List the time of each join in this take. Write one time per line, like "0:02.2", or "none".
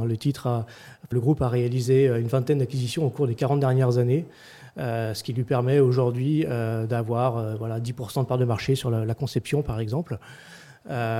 0:01.1